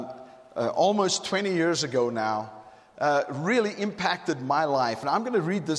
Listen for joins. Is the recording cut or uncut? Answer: uncut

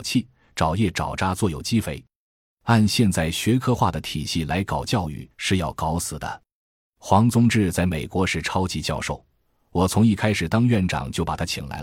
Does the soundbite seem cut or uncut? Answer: cut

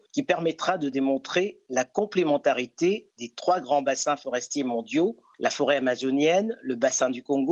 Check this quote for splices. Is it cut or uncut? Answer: uncut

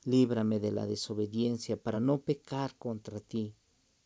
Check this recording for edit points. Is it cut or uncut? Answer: uncut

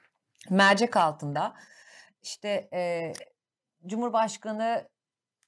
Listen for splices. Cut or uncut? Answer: uncut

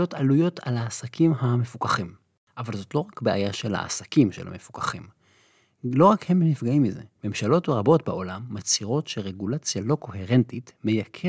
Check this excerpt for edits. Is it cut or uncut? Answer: uncut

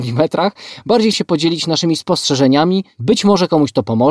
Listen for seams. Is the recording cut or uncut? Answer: cut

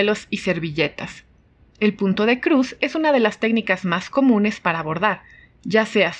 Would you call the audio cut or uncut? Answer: uncut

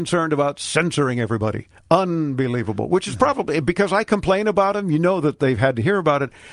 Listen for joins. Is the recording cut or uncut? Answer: cut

